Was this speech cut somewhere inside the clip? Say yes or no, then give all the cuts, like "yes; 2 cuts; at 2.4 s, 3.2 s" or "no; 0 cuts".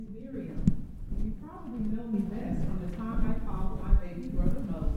no; 0 cuts